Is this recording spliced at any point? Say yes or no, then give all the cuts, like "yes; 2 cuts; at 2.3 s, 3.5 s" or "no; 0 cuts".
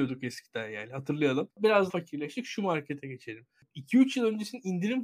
yes; 1 cut; at 1.9 s